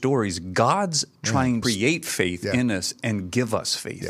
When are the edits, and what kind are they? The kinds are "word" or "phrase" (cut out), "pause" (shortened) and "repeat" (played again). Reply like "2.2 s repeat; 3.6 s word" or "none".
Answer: 1.6 s phrase